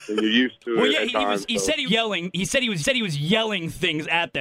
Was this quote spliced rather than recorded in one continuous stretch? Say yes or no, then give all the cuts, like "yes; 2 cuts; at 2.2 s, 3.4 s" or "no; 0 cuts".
yes; 3 cuts; at 1.1 s, 1.9 s, 2.8 s